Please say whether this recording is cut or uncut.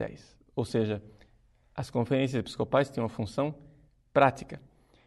uncut